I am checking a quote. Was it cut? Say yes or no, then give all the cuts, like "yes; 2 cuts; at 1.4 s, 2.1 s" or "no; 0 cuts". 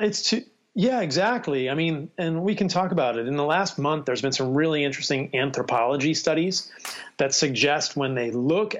no; 0 cuts